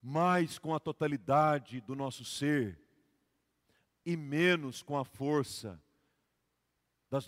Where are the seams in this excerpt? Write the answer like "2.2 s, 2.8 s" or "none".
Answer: none